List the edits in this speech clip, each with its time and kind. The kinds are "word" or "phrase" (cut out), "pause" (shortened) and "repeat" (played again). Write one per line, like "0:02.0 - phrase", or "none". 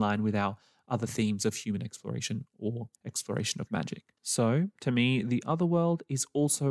0:03.0 - pause
0:04.2 - pause

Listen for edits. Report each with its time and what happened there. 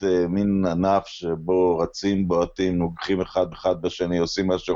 0:03.5 - repeat

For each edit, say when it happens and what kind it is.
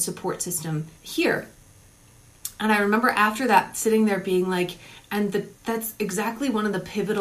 0:01.0 - pause
0:05.6 - pause

